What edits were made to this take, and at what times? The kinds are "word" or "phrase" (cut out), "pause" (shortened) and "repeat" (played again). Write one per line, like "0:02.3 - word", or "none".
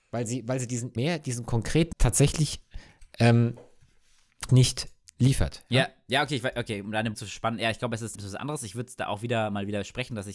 0:01.0 - word
0:01.9 - word
0:04.5 - word
0:05.0 - word
0:07.1 - word
0:08.1 - word